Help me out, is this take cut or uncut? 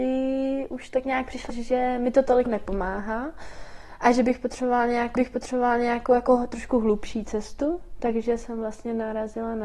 cut